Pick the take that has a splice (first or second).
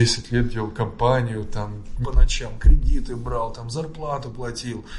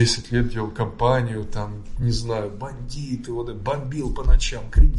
first